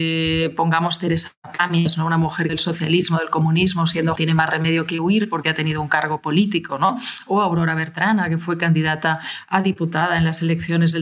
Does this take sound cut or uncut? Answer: cut